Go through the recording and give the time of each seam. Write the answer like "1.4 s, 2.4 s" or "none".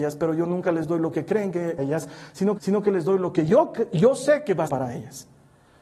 1.8 s, 2.6 s, 4.7 s